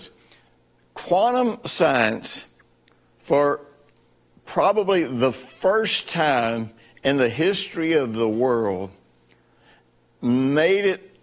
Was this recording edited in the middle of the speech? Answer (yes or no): no